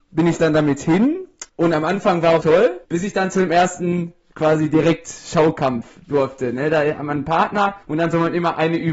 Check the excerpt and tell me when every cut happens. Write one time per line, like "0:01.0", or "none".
0:01.5
0:02.4
0:02.8
0:07.8